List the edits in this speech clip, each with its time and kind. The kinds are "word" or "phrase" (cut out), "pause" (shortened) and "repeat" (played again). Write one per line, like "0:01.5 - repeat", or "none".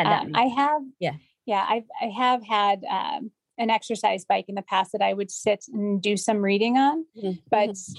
none